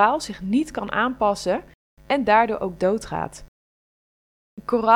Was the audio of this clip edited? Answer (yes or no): no